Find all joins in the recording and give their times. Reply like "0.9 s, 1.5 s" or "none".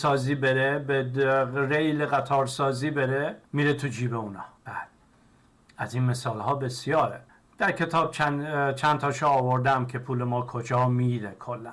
3.5 s, 4.6 s, 7.3 s